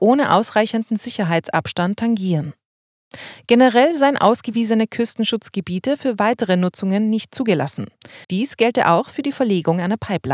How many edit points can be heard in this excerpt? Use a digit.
1